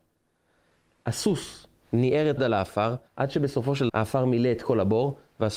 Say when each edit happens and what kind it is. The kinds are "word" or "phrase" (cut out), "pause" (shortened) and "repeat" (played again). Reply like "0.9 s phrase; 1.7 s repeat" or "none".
2.4 s phrase; 3.1 s pause; 3.9 s word